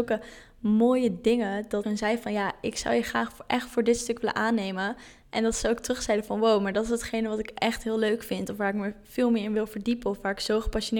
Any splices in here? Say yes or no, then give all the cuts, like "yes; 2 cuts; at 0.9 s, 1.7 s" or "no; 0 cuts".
yes; 1 cut; at 1.8 s